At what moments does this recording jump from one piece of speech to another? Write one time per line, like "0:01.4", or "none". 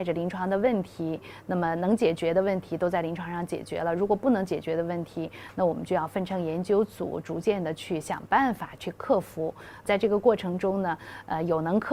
0:09.9